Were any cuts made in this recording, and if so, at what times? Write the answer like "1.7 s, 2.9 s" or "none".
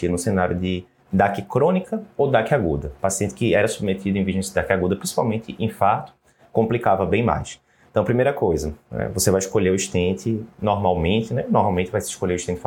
none